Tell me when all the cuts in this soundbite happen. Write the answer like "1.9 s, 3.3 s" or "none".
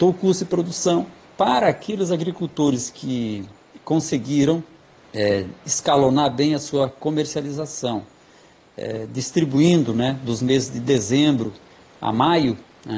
none